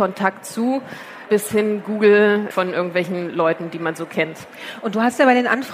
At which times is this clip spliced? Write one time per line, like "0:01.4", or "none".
none